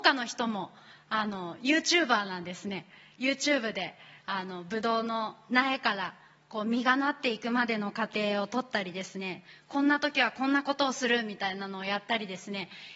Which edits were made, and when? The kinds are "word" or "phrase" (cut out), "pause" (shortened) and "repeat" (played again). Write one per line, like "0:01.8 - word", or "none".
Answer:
none